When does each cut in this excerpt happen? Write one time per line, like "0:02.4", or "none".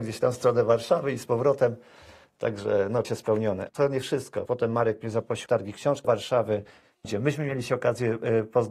0:03.0
0:03.7
0:04.5
0:05.5
0:06.0
0:07.0